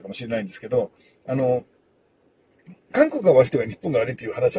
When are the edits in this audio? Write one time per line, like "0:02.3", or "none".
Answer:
none

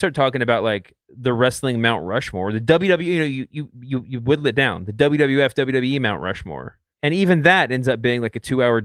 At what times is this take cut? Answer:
0:06.9

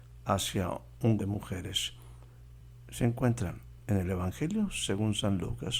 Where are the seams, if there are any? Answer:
0:01.2

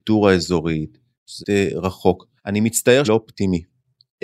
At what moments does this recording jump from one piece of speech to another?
0:01.4
0:02.4
0:03.0

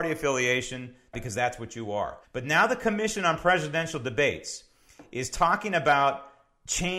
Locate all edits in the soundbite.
0:01.1
0:02.2

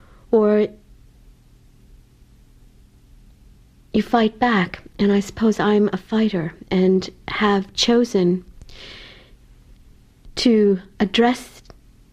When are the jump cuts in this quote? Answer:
none

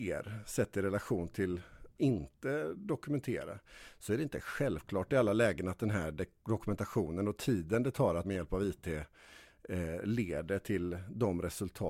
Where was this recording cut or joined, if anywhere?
0:02.0
0:08.2

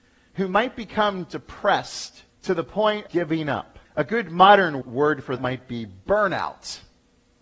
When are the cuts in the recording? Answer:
0:02.3
0:03.1
0:03.8
0:04.8
0:05.4

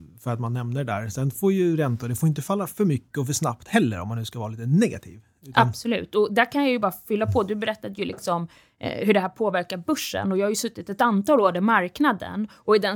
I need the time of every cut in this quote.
none

